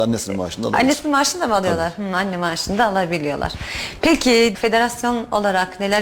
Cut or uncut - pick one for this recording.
cut